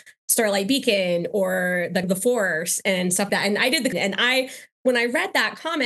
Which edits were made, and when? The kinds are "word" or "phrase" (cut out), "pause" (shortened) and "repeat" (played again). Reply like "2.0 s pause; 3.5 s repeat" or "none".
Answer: 2.0 s word; 3.3 s word; 3.9 s word